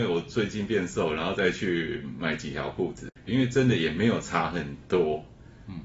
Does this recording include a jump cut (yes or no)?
yes